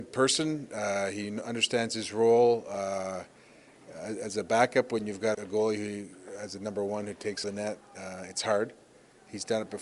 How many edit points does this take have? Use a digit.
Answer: 2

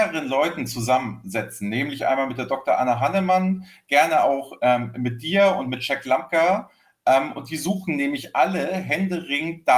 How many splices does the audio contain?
0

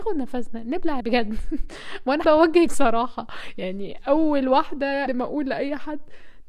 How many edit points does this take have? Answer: 4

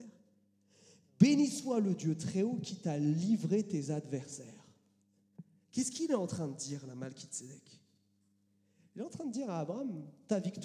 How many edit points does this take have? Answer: 0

